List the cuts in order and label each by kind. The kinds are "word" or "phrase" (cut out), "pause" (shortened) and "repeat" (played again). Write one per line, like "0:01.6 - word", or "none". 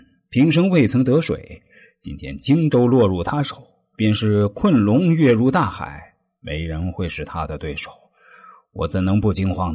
none